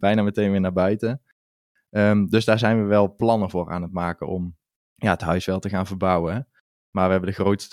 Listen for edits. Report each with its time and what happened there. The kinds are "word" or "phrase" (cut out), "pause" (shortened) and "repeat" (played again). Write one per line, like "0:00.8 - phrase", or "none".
0:04.8 - pause